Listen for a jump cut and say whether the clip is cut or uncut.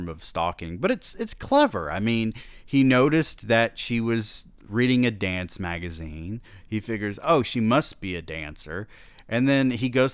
uncut